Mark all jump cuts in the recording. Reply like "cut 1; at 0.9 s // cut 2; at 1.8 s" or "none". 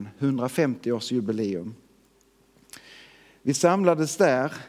none